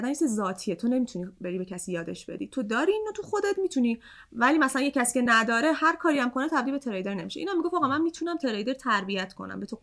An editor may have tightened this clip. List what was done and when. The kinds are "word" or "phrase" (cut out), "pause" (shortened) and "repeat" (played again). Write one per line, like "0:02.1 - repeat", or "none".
none